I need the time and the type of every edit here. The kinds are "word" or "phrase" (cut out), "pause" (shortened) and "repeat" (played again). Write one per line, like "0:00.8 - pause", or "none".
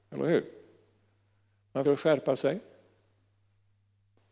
0:01.9 - word

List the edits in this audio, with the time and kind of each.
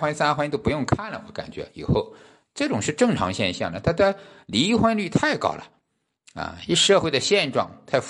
none

